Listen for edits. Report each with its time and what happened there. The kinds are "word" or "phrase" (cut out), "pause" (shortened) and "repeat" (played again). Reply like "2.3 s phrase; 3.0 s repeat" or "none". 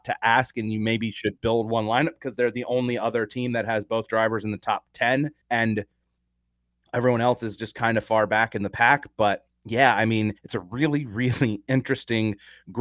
5.4 s pause; 10.4 s pause